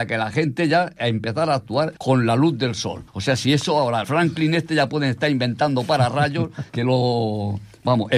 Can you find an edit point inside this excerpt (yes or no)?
yes